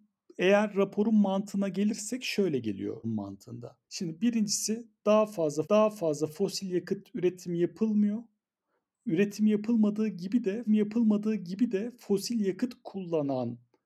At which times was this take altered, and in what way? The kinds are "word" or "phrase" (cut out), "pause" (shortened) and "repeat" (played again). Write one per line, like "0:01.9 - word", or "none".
0:03.0 - word
0:03.8 - pause
0:05.6 - repeat
0:10.7 - repeat

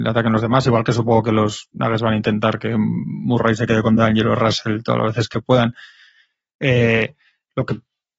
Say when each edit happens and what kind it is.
none

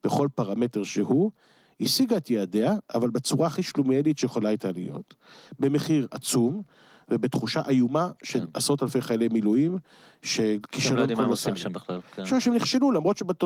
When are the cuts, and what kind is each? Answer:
none

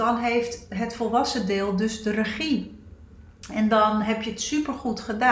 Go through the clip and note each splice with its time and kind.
none

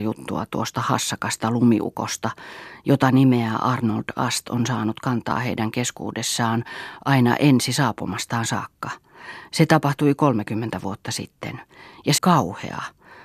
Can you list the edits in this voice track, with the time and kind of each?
0:12.2 - word

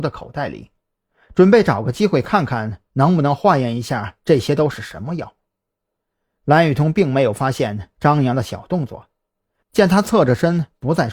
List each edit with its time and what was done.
none

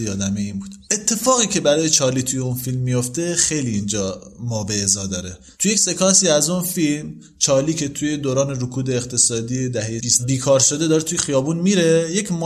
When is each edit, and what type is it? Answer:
none

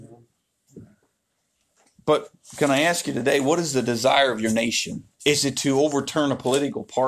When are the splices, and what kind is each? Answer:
0:05.1 - pause

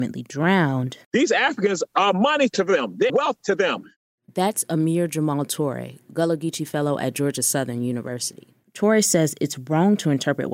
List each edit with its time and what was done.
0:01.0 - pause
0:03.1 - word
0:08.6 - pause

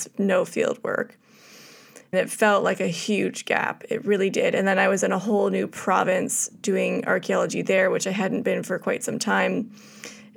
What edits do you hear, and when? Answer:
0:02.1 - word

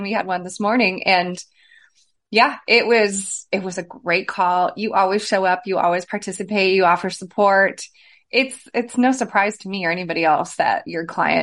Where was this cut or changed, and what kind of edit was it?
none

